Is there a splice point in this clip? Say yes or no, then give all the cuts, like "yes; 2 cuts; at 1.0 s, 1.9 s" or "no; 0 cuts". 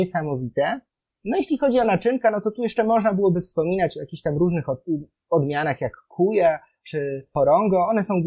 no; 0 cuts